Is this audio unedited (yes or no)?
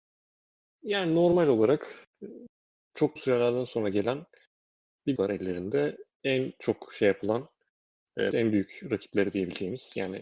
no